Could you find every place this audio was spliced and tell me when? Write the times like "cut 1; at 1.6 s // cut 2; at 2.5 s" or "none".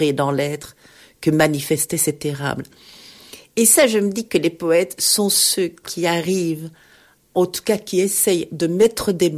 none

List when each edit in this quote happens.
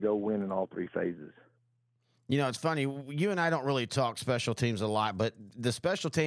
none

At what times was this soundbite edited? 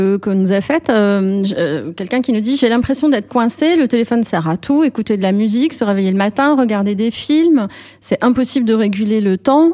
none

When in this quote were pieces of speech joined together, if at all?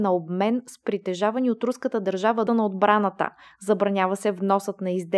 cut 1; at 2.5 s

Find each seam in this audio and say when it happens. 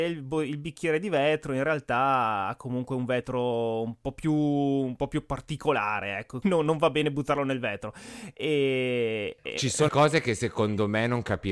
cut 1; at 6.4 s // cut 2; at 9.9 s

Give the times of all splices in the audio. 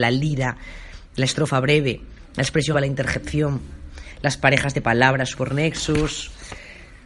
cut 1; at 2.7 s // cut 2; at 5.3 s

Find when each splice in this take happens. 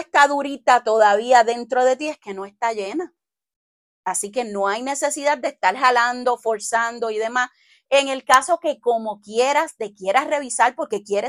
none

